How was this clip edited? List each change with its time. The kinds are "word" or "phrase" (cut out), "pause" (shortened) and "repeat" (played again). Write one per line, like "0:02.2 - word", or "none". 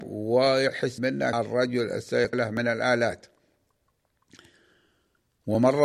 0:01.0 - word
0:01.3 - word
0:02.3 - word